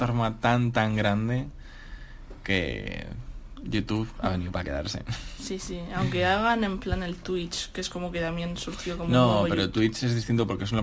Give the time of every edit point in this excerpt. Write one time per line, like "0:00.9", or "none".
none